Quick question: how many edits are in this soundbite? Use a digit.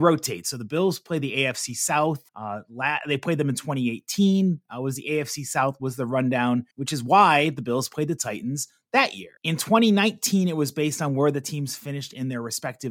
3